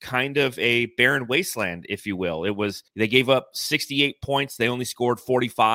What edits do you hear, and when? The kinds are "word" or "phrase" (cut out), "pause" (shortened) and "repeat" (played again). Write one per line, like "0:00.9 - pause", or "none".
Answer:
0:02.9 - pause